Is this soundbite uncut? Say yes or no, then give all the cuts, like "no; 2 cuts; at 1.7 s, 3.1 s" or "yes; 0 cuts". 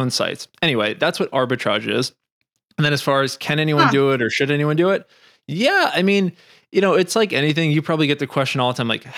yes; 0 cuts